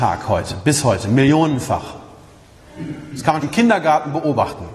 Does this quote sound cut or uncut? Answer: cut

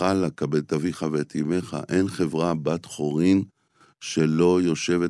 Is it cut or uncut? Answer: uncut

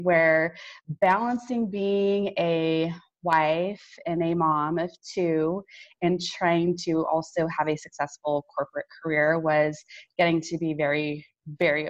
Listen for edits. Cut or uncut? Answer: uncut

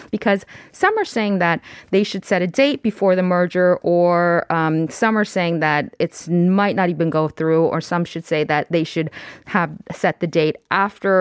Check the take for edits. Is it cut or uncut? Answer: uncut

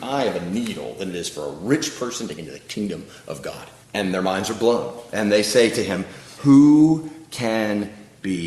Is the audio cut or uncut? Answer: cut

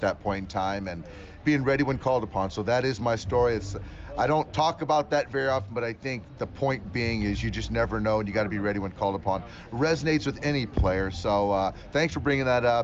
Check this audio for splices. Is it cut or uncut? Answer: cut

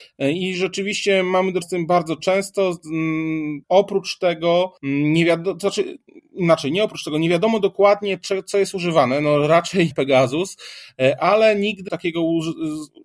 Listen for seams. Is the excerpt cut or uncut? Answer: cut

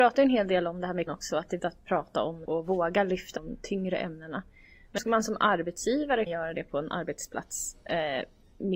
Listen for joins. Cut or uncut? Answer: cut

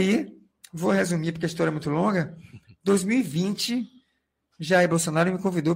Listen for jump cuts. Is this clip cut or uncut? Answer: uncut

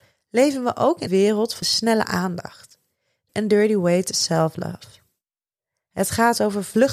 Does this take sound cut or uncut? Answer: cut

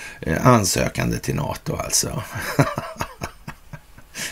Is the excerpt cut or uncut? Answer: uncut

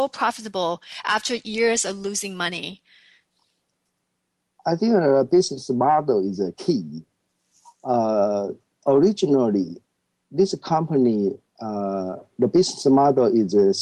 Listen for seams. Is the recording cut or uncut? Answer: uncut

